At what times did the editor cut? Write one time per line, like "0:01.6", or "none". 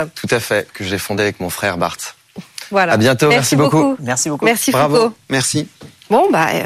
none

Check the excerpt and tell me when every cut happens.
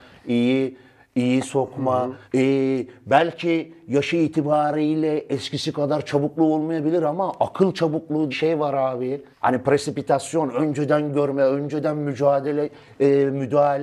0:02.2
0:08.3
0:09.3

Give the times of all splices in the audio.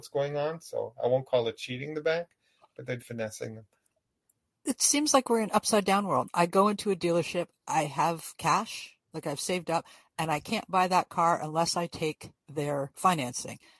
0:03.0

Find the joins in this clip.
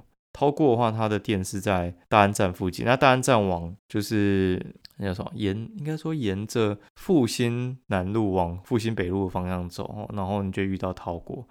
0:02.0
0:03.8
0:04.8
0:06.9

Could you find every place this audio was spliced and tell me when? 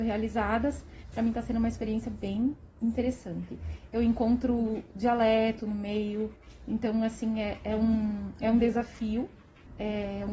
0:01.1

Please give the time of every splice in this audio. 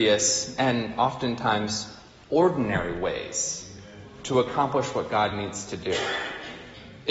none

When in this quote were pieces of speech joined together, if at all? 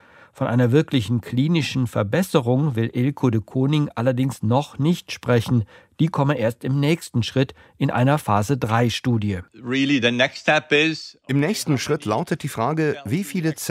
none

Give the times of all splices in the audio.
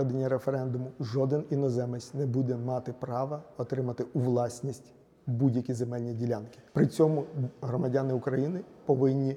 0:06.7

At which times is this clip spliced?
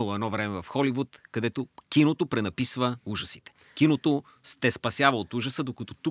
none

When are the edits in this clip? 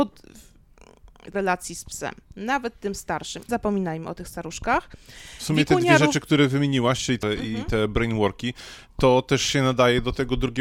0:01.3
0:03.5
0:07.2

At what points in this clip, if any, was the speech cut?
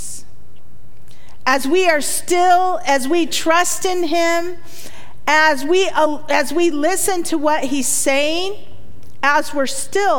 none

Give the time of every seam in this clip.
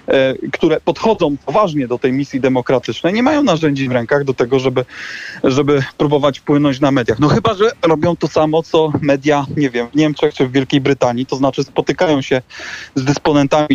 none

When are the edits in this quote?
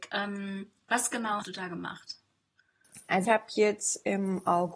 0:01.4
0:03.3

